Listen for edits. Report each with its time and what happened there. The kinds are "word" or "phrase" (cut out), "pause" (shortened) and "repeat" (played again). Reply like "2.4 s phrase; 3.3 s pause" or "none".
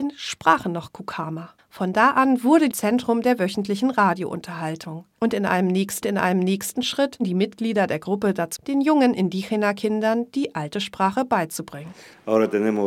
1.6 s pause; 2.7 s phrase; 5.1 s pause; 6.0 s repeat; 8.6 s word